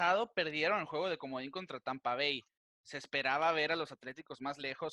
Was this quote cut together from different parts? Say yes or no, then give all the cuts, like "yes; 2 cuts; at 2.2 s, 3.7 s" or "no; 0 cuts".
no; 0 cuts